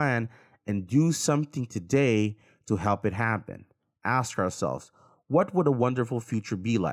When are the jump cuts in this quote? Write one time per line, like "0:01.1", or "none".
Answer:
none